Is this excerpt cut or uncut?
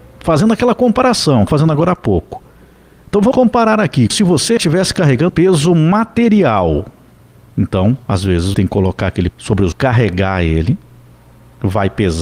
cut